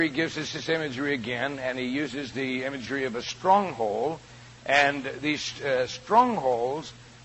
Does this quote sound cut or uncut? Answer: uncut